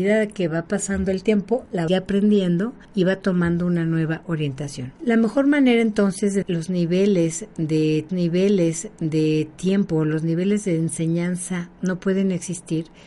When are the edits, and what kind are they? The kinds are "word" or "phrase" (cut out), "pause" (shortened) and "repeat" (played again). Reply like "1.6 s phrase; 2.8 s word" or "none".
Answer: 1.9 s phrase; 2.8 s pause; 5.0 s pause; 6.4 s phrase; 8.1 s repeat